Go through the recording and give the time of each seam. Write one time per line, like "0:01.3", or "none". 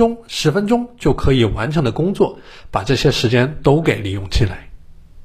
none